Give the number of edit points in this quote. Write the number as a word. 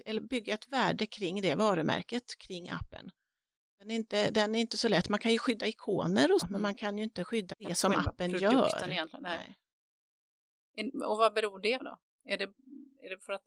three